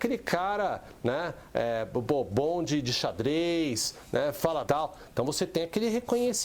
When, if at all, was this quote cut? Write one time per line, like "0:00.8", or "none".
0:04.7